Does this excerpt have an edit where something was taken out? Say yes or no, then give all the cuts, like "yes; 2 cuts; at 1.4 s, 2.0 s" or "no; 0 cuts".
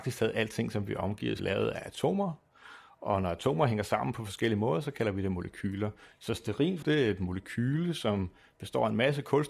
yes; 2 cuts; at 1.4 s, 6.8 s